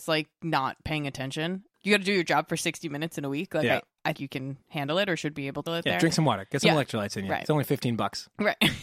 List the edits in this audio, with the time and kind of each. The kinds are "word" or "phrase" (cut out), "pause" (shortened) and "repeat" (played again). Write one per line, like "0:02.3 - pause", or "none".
0:04.1 - word
0:04.6 - pause
0:05.7 - word